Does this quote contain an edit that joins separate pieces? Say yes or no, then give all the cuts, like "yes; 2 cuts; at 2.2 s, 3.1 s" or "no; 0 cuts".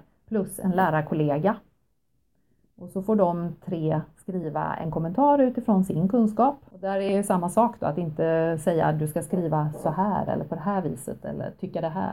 no; 0 cuts